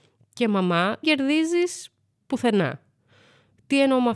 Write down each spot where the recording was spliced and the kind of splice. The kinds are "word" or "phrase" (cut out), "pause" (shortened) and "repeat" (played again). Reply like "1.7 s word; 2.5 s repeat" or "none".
1.0 s word